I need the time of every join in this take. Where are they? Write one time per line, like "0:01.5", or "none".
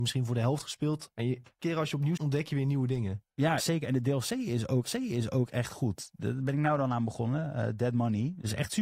0:01.1
0:01.6
0:02.2
0:03.6
0:04.9